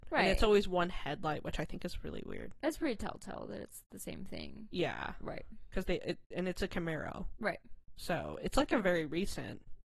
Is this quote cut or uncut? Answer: uncut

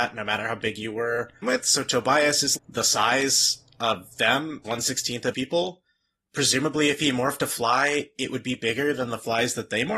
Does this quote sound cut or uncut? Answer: cut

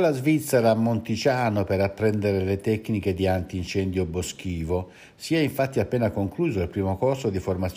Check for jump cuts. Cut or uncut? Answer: uncut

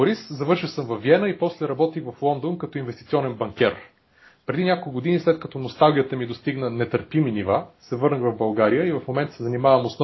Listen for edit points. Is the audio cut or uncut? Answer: uncut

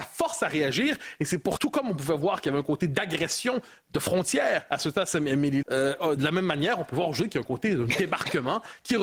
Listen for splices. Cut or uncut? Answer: cut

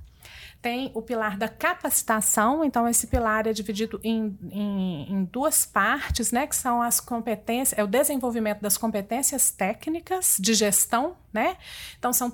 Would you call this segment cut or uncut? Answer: uncut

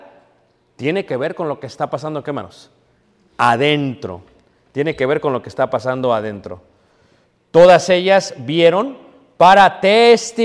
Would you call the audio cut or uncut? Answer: uncut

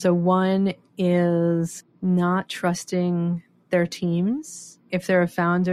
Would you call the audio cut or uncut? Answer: uncut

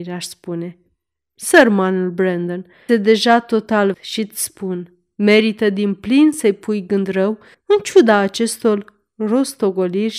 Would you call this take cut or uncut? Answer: cut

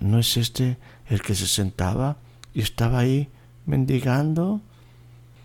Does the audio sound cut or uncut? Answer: uncut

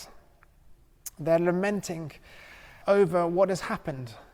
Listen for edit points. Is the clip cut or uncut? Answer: cut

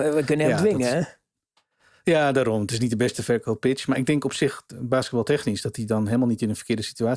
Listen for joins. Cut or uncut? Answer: uncut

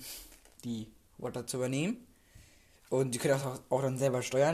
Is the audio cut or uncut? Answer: uncut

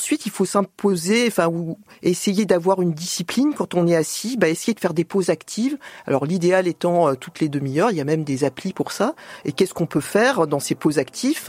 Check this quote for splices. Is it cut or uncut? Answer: uncut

